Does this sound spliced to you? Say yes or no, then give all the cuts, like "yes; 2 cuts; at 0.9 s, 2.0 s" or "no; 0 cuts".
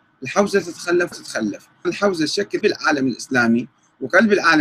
yes; 3 cuts; at 1.1 s, 1.8 s, 2.6 s